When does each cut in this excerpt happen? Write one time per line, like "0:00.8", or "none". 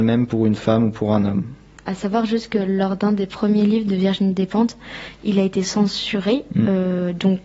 none